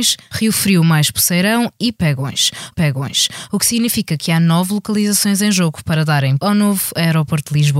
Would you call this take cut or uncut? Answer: cut